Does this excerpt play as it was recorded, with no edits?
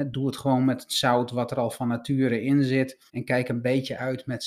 no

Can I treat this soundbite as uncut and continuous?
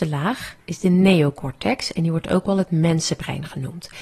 yes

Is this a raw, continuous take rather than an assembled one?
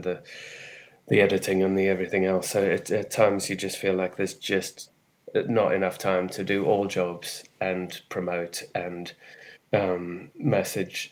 no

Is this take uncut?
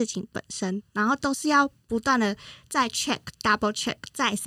yes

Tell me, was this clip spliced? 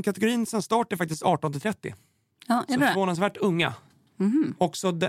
no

